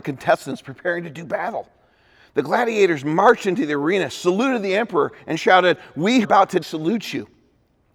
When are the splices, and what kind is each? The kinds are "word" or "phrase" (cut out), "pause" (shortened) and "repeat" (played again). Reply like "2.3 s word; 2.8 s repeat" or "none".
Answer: 6.2 s word; 6.6 s word